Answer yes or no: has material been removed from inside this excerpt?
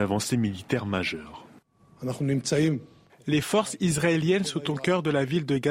no